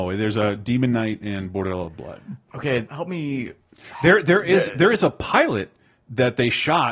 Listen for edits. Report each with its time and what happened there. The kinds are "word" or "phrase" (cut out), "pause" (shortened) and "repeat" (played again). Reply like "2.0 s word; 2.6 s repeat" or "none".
2.9 s word